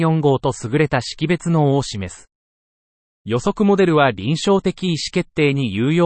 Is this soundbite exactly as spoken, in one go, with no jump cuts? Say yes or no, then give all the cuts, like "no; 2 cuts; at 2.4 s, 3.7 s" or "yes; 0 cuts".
yes; 0 cuts